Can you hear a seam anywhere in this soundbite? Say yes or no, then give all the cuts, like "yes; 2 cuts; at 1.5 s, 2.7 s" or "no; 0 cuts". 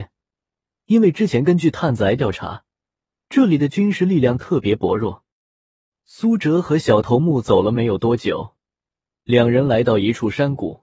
no; 0 cuts